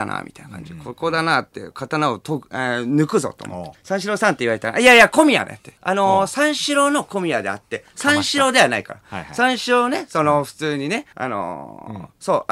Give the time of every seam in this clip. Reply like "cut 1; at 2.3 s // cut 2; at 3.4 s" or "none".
cut 1; at 3.7 s // cut 2; at 5.8 s // cut 3; at 11.1 s